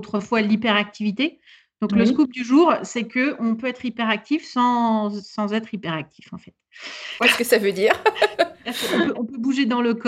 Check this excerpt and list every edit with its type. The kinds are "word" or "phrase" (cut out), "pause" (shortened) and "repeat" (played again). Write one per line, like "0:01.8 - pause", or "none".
none